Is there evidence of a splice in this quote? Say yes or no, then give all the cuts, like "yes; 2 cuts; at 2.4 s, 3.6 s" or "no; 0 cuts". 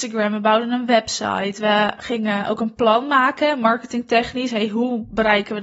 no; 0 cuts